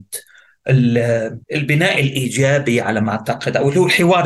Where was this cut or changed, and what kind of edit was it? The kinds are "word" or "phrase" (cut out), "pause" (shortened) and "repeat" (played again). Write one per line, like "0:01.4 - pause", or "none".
0:01.4 - pause